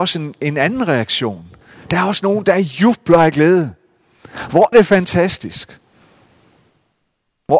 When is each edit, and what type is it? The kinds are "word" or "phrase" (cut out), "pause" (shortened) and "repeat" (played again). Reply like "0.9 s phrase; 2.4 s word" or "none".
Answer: 1.6 s pause; 4.7 s word